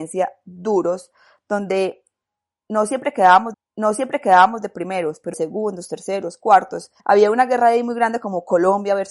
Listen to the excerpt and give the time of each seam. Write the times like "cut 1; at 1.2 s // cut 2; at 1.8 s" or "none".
cut 1; at 3.5 s // cut 2; at 5.3 s // cut 3; at 7.0 s